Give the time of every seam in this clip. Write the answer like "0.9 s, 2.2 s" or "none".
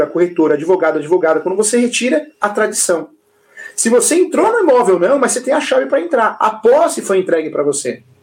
2.3 s